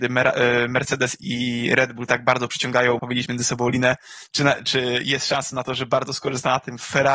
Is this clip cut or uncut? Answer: cut